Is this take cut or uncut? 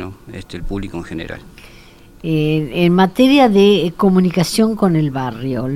uncut